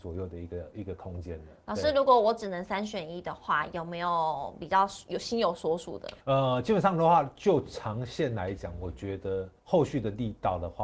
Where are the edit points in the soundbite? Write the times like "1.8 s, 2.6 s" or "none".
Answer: 6.2 s, 9.6 s

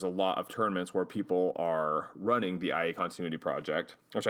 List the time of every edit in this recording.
none

